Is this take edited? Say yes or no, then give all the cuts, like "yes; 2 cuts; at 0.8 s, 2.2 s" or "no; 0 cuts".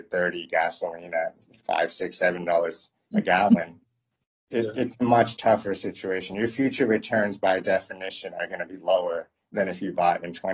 no; 0 cuts